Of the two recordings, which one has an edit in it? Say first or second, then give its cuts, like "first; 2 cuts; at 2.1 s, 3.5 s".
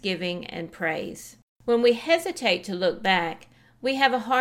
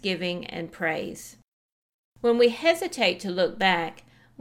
first; 1 cut; at 1.4 s